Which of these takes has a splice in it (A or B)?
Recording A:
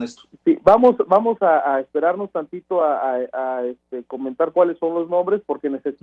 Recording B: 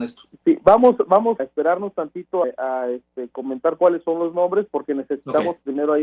B